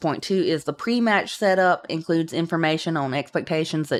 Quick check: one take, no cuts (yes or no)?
yes